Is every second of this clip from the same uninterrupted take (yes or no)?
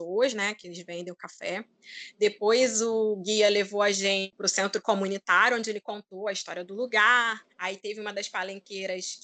no